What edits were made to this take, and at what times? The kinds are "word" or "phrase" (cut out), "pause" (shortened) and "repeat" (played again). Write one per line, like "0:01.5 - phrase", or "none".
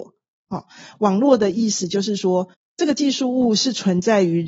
0:02.5 - pause